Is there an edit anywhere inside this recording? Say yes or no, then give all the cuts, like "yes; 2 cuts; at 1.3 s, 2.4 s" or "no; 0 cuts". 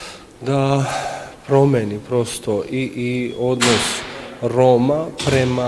no; 0 cuts